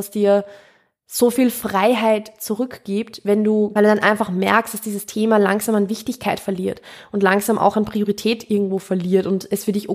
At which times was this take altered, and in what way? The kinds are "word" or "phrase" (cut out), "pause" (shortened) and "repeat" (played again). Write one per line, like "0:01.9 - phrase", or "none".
0:03.8 - phrase